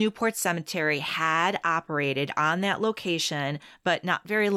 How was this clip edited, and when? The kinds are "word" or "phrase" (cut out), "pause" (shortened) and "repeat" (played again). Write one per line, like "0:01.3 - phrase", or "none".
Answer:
none